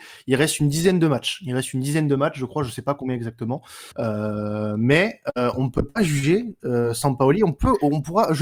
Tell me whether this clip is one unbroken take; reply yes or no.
no